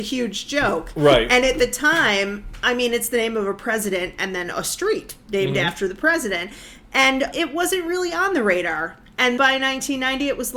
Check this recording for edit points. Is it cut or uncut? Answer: cut